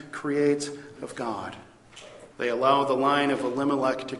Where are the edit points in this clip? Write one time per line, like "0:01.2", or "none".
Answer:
0:01.0
0:02.3